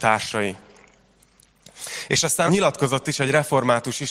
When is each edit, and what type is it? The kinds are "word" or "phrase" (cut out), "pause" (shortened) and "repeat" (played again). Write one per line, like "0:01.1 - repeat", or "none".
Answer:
0:02.5 - word